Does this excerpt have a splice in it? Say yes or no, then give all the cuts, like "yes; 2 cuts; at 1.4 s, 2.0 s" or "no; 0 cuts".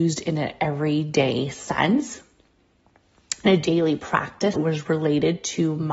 yes; 1 cut; at 4.5 s